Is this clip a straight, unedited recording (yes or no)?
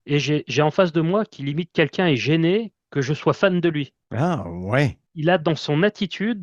no